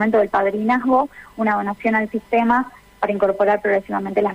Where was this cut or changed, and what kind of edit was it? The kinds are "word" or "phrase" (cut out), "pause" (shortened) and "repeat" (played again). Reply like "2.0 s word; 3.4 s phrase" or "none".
none